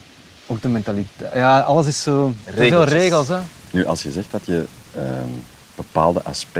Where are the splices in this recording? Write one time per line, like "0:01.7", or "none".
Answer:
0:04.9